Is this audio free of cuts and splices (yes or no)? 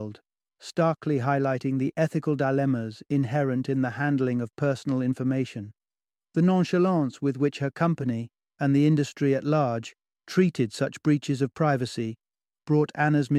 yes